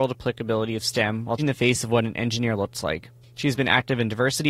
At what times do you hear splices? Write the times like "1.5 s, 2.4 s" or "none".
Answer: 1.4 s